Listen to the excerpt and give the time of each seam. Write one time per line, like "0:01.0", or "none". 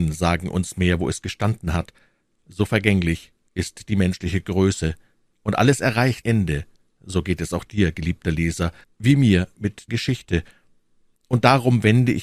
0:06.2
0:08.8
0:09.9